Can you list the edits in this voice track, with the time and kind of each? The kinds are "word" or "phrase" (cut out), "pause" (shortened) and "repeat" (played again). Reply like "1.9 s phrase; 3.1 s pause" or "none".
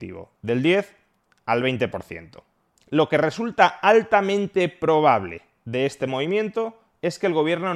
none